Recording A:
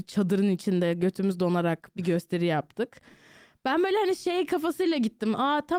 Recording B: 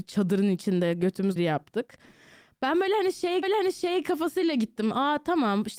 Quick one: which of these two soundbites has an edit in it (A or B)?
B